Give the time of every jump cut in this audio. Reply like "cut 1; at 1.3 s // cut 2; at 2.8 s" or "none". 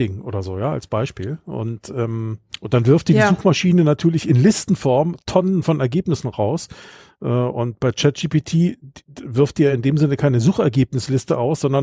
none